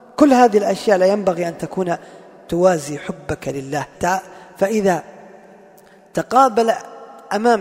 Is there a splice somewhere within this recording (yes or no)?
yes